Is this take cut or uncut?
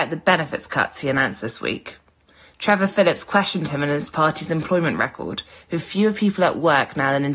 uncut